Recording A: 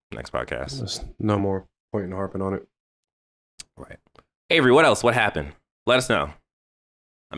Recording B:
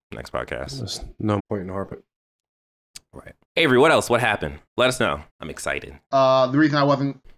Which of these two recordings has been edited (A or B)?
B